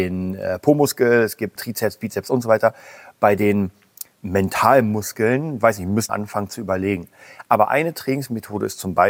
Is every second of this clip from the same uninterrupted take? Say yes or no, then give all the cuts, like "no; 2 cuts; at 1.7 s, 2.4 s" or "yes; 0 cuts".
no; 3 cuts; at 1.6 s, 4.1 s, 6.1 s